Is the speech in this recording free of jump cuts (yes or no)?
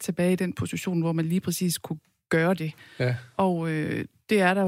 yes